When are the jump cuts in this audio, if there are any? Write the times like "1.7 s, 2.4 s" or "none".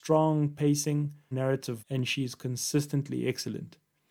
1.3 s, 1.8 s